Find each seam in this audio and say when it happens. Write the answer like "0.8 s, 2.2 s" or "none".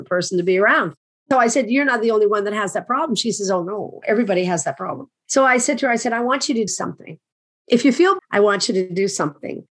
6.7 s, 8.2 s

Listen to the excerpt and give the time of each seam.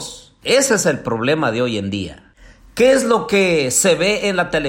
none

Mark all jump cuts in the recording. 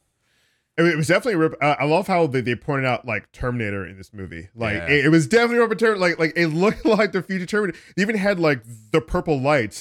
none

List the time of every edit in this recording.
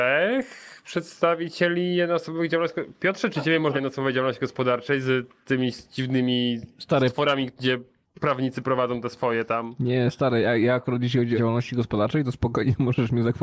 3.7 s, 8.0 s, 11.4 s

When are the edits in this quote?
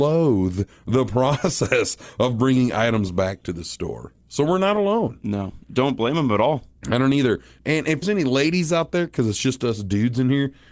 6.8 s, 8.0 s

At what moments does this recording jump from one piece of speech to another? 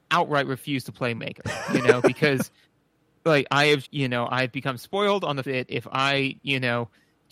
1.2 s, 2.6 s, 3.8 s, 5.4 s

